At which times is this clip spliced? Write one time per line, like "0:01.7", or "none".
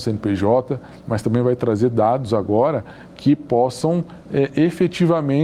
none